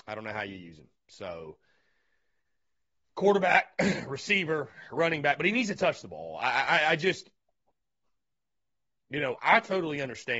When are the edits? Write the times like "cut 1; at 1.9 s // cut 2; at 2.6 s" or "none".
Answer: cut 1; at 9.4 s